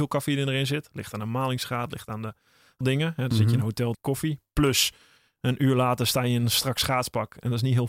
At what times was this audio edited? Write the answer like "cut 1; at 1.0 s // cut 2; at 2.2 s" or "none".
cut 1; at 2.8 s // cut 2; at 3.9 s